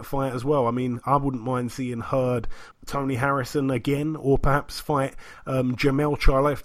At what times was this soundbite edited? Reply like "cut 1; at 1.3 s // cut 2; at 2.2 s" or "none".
cut 1; at 2.7 s

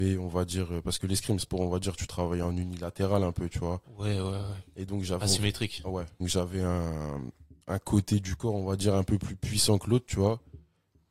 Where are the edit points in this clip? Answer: cut 1; at 1.4 s // cut 2; at 6.2 s // cut 3; at 7.6 s

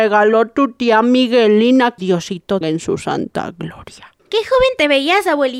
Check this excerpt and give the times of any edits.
cut 1; at 2.0 s // cut 2; at 2.6 s // cut 3; at 4.2 s

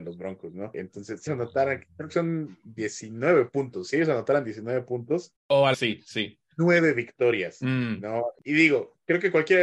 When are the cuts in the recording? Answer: cut 1; at 1.3 s // cut 2; at 5.4 s // cut 3; at 5.7 s

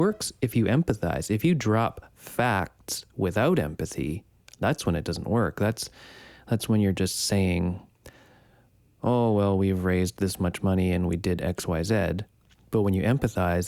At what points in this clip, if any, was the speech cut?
none

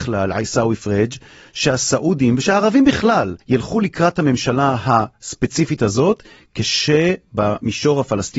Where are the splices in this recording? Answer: cut 1; at 3.4 s

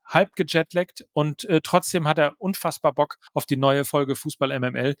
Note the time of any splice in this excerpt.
cut 1; at 3.3 s

